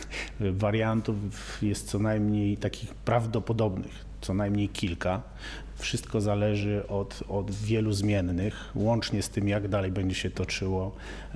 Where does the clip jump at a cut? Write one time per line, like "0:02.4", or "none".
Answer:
none